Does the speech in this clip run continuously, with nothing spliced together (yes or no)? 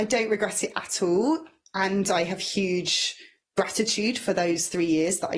yes